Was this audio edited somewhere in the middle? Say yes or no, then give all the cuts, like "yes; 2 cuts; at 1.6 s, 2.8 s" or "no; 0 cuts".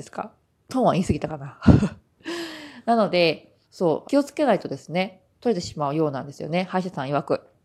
yes; 2 cuts; at 3.6 s, 4.0 s